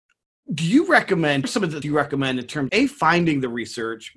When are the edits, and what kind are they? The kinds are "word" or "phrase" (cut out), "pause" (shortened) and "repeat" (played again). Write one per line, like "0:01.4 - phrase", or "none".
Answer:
0:01.4 - word
0:01.8 - word
0:02.7 - word